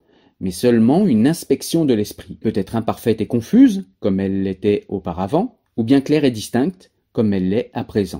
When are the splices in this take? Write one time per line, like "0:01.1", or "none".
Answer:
0:02.4
0:05.7
0:07.0